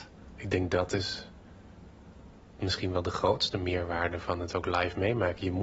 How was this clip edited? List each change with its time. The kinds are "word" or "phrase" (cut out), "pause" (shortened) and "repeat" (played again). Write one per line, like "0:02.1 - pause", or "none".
none